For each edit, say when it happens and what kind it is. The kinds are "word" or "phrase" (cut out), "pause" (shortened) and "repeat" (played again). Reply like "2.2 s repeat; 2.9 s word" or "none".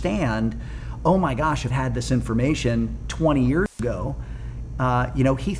1.7 s word